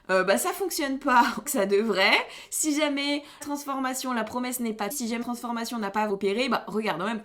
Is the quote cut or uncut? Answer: cut